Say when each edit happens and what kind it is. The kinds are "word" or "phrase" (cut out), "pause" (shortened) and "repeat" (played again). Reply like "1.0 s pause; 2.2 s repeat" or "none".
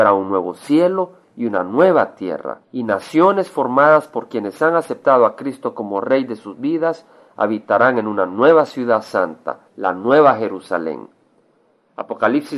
2.6 s pause; 9.7 s pause